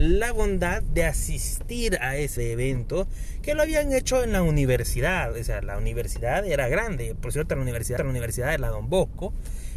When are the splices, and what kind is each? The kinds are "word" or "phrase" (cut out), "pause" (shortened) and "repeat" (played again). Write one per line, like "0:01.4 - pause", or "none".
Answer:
0:02.4 - word
0:08.0 - repeat